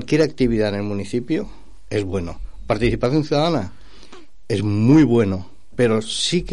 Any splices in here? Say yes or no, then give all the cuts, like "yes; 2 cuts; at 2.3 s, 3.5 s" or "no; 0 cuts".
no; 0 cuts